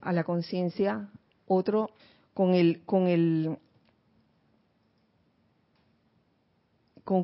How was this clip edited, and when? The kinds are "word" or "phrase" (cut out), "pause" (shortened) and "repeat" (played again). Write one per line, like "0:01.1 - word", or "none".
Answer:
0:02.0 - pause